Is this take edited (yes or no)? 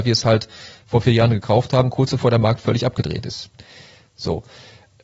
no